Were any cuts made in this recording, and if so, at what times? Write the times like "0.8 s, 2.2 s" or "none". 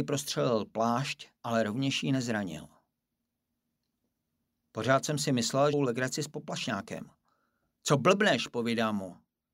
1.4 s, 5.7 s